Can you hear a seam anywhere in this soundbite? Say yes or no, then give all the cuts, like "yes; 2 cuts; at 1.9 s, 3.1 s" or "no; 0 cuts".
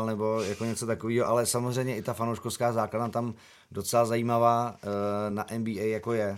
no; 0 cuts